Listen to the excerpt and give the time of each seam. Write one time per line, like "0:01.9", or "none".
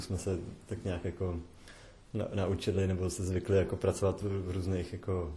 0:04.2

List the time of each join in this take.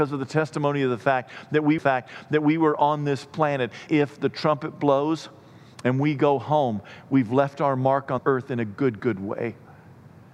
0:01.8
0:03.9
0:08.2
0:09.0

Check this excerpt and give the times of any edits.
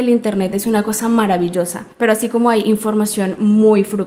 0:01.9

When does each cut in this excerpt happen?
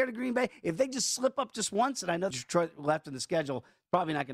0:02.3

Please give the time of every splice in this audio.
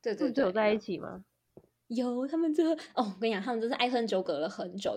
0:01.7

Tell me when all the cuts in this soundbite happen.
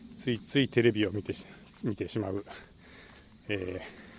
none

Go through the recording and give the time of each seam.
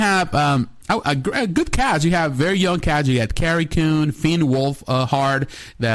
none

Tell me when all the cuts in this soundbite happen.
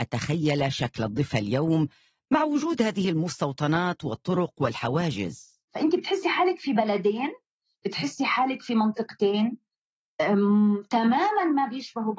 0:05.7

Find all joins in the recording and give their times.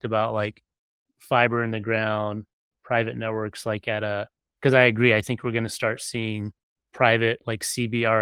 none

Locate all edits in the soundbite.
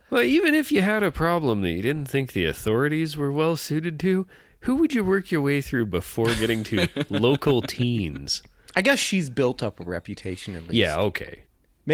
none

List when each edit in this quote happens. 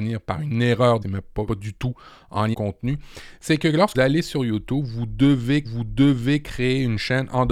0:01.0
0:01.5
0:02.5
0:03.9
0:05.6

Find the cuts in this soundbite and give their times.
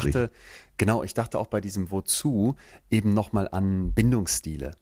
none

